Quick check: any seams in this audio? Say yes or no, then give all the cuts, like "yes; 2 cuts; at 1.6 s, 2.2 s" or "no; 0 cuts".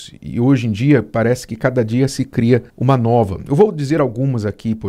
yes; 1 cut; at 2.7 s